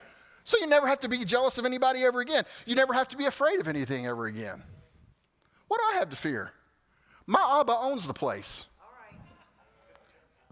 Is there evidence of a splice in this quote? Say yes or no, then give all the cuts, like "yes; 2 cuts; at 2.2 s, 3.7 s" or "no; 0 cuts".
no; 0 cuts